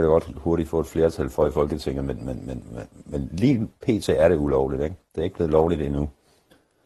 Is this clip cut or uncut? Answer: uncut